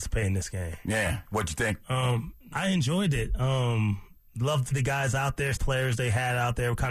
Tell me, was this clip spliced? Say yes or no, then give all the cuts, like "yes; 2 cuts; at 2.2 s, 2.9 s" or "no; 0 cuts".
yes; 3 cuts; at 2.5 s, 4.7 s, 5.6 s